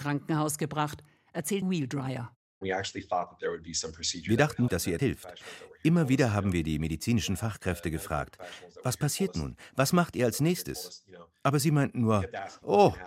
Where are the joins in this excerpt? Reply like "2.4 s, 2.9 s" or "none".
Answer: 1.6 s, 4.7 s, 5.0 s